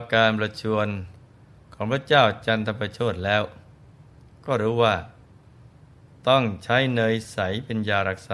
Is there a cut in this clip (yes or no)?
no